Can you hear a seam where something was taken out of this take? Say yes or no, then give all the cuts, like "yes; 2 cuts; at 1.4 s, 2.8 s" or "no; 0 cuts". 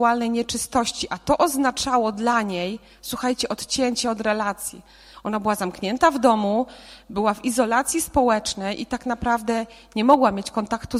no; 0 cuts